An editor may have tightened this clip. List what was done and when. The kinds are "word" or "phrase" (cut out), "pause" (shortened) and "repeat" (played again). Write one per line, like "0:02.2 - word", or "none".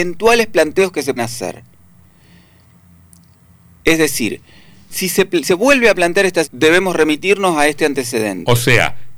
0:01.2 - word
0:04.9 - word
0:05.4 - word
0:06.4 - word